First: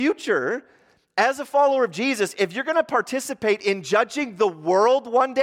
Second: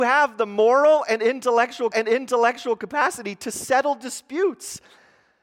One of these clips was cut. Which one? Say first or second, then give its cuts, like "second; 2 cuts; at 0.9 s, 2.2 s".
second; 1 cut; at 1.9 s